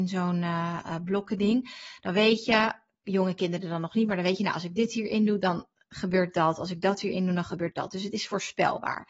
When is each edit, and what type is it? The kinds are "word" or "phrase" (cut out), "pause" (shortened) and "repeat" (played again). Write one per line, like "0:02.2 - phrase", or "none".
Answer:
none